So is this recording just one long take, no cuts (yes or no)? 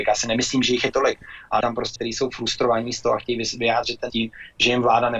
no